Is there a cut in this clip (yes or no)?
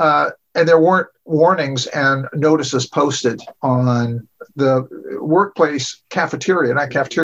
yes